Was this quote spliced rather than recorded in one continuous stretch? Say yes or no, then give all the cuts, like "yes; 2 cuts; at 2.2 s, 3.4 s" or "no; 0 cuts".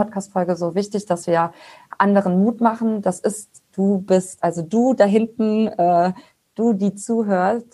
no; 0 cuts